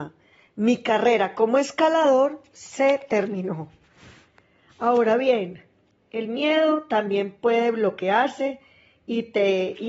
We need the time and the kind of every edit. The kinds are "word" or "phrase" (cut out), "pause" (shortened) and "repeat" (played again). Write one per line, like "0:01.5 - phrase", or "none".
none